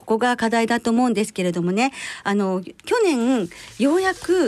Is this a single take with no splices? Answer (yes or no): no